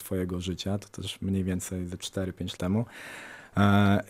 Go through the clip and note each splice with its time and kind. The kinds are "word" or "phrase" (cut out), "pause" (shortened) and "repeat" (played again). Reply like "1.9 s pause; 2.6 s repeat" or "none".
2.6 s word

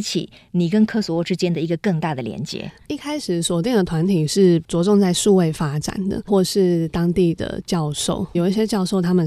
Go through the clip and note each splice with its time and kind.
6.3 s word; 8.3 s word

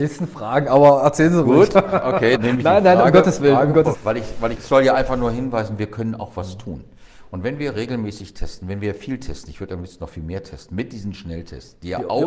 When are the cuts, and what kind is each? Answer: 2.4 s word; 3.9 s word; 4.6 s word

